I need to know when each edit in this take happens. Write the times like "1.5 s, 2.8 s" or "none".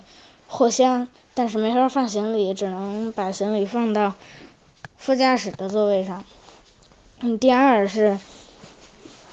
none